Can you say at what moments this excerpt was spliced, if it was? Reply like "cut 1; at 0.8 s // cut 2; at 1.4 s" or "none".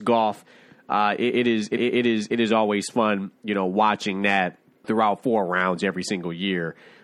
cut 1; at 1.8 s // cut 2; at 3.4 s // cut 3; at 4.8 s